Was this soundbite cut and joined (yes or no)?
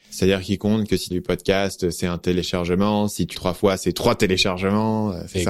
yes